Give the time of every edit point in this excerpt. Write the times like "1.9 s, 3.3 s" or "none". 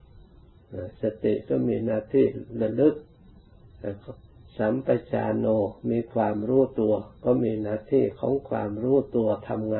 4.4 s